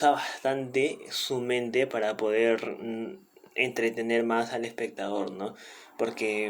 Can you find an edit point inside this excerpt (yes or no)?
no